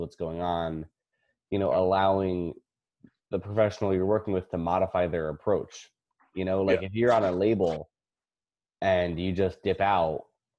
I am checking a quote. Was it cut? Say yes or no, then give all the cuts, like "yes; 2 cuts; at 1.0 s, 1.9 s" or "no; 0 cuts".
no; 0 cuts